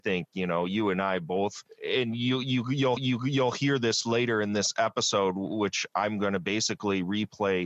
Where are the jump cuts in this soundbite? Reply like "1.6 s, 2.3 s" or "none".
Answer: 3.0 s